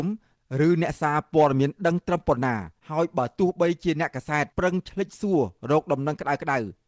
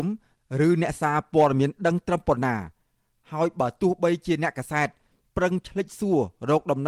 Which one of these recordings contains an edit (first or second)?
first